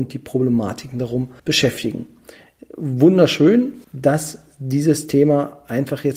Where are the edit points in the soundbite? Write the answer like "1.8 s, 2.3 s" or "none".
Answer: 1.4 s, 3.8 s